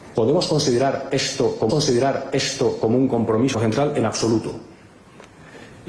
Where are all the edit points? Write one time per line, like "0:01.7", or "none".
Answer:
0:01.7
0:03.5